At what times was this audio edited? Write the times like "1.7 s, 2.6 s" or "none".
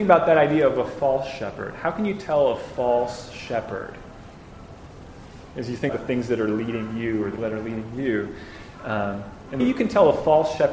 5.5 s, 5.9 s, 7.4 s, 9.6 s